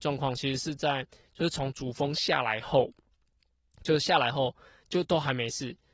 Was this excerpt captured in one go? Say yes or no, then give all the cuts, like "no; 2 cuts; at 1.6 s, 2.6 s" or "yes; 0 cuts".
yes; 0 cuts